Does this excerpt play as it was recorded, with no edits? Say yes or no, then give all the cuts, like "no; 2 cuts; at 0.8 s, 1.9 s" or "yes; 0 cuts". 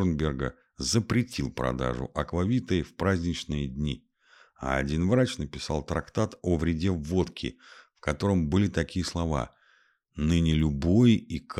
yes; 0 cuts